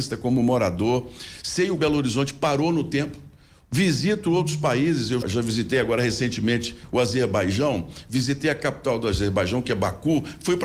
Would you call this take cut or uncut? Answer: cut